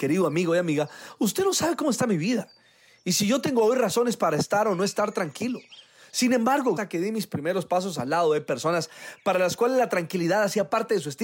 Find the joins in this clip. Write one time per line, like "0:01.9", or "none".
0:06.8